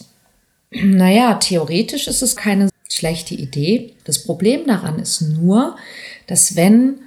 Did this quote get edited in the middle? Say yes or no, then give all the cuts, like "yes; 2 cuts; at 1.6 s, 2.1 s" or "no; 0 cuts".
yes; 3 cuts; at 2.4 s, 2.7 s, 4.0 s